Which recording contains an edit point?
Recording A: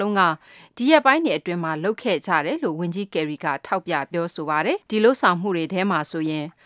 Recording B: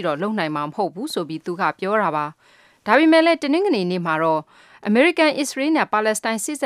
A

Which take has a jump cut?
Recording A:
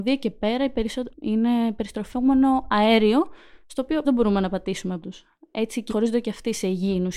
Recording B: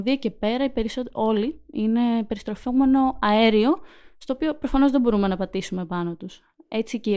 A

